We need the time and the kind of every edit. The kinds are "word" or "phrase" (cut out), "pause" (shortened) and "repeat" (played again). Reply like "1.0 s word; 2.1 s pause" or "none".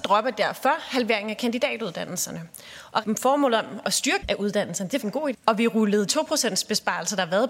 3.0 s phrase; 4.2 s word; 5.0 s word; 5.3 s word; 6.1 s word